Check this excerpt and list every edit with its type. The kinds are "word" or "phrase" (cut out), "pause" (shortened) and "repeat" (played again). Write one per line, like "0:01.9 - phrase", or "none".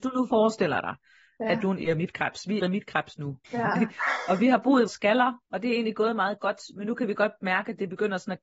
0:02.6 - word
0:03.4 - pause
0:04.9 - word
0:05.4 - pause